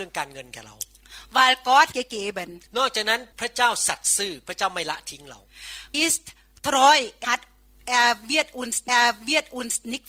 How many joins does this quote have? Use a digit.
6